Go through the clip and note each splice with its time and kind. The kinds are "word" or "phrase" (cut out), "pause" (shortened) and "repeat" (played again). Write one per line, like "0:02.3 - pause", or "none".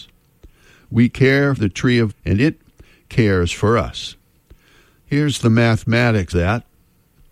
0:01.6 - word
0:02.1 - word
0:06.3 - word

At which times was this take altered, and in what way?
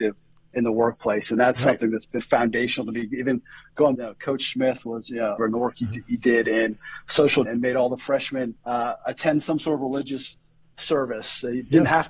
0:02.2 - word
0:04.0 - phrase
0:05.4 - phrase
0:07.5 - phrase
0:08.6 - pause

